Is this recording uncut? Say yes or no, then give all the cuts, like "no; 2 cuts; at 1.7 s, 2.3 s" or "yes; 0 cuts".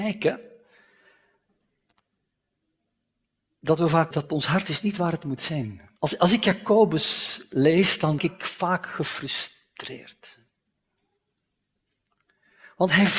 no; 3 cuts; at 4.1 s, 6.0 s, 8.2 s